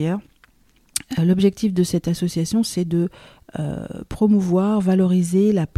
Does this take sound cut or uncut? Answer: uncut